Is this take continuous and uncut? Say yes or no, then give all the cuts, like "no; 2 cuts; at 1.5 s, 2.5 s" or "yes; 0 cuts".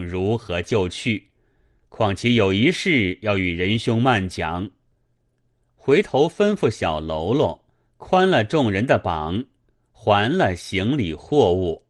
yes; 0 cuts